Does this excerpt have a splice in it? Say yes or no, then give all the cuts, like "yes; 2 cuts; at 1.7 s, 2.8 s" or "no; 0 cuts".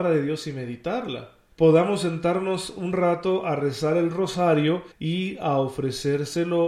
yes; 2 cuts; at 1.5 s, 4.9 s